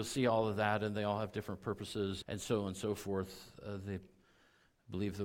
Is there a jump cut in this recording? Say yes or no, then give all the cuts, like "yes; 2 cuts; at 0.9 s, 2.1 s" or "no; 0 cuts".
yes; 1 cut; at 2.2 s